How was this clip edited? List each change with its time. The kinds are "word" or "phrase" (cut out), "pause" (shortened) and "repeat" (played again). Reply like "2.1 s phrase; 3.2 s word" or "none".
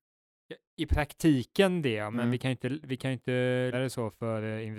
3.7 s word